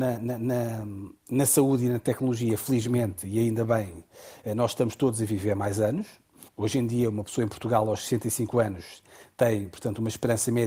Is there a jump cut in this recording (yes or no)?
yes